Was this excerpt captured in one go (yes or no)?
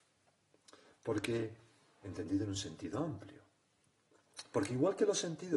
yes